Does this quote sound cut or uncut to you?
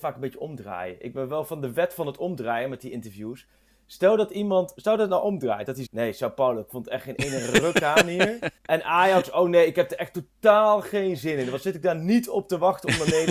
cut